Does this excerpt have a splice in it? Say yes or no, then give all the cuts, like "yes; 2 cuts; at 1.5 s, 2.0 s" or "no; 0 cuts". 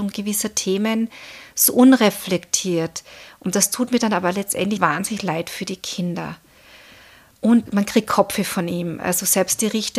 yes; 2 cuts; at 4.8 s, 7.7 s